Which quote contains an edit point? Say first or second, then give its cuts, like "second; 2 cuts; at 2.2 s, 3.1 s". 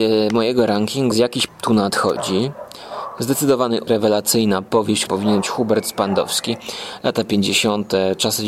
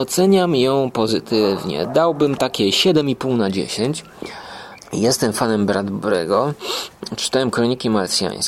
first; 5 cuts; at 1.1 s, 1.5 s, 3.9 s, 5.1 s, 5.4 s